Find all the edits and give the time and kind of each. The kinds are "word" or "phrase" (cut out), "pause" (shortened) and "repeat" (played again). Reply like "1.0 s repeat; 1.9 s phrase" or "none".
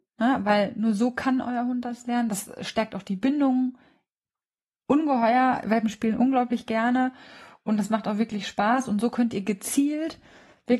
none